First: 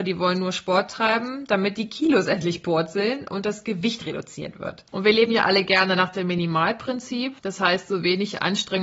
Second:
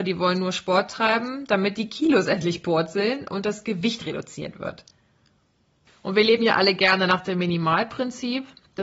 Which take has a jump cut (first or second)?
first